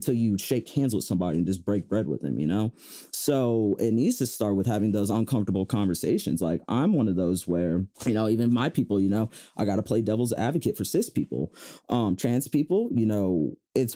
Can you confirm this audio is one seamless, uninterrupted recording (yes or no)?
no